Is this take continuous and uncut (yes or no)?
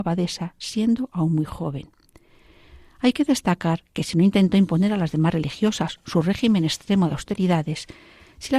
yes